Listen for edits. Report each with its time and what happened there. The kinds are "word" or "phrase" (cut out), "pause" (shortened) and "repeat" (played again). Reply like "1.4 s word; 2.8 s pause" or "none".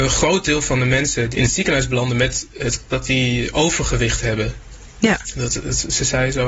1.3 s word; 2.9 s word